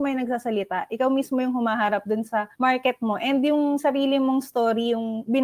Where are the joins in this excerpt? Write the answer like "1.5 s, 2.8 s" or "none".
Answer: 2.5 s